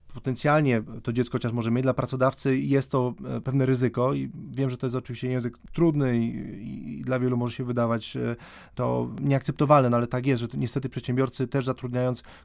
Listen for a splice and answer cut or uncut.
uncut